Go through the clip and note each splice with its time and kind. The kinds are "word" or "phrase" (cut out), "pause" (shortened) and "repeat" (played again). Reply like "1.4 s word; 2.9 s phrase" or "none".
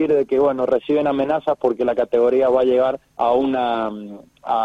3.1 s pause